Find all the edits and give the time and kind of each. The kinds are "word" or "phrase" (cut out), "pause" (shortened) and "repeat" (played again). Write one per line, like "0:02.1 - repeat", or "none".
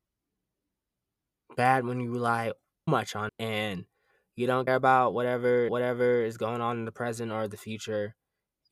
0:02.9 - word
0:03.3 - word
0:04.7 - word
0:05.7 - repeat